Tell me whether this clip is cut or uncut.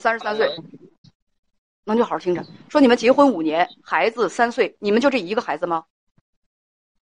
cut